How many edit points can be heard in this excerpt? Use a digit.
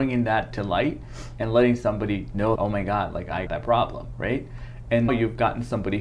3